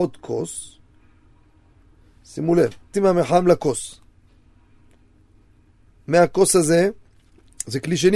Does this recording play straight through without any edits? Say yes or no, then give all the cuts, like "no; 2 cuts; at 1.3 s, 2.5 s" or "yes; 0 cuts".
no; 1 cut; at 2.9 s